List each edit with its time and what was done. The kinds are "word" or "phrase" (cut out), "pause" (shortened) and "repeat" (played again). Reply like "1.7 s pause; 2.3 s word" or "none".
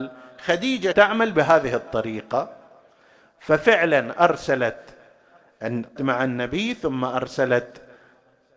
0.9 s word; 6.0 s word